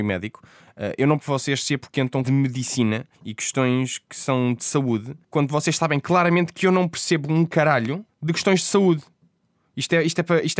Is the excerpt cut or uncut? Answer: cut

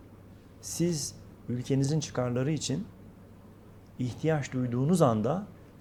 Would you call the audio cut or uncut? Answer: uncut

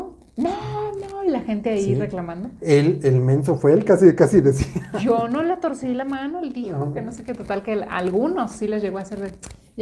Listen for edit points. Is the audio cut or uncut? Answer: uncut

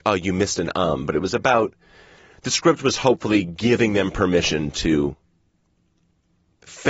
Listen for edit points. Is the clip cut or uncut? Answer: uncut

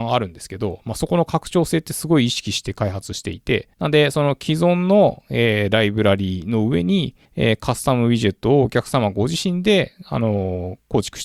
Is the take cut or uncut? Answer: cut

